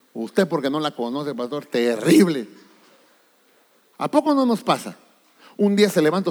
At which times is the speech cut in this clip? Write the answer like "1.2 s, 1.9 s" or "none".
none